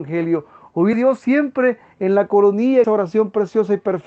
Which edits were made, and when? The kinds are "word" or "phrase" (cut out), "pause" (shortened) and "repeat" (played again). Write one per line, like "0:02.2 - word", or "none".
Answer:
0:00.9 - word
0:02.8 - word